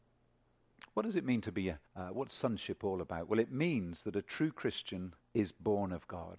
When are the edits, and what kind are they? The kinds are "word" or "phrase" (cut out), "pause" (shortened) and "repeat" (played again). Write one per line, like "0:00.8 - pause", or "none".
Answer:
0:01.9 - pause
0:05.2 - pause